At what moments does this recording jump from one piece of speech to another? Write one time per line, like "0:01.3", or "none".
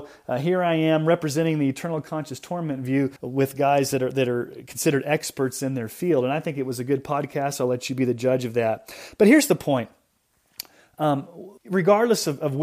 0:03.2
0:11.6